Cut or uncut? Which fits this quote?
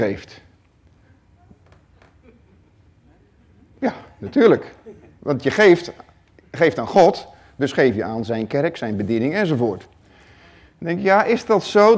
uncut